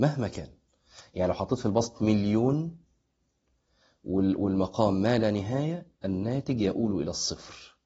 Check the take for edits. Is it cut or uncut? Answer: uncut